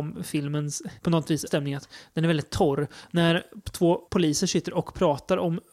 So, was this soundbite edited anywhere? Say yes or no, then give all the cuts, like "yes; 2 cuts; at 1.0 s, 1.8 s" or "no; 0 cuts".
yes; 3 cuts; at 1.0 s, 1.5 s, 4.1 s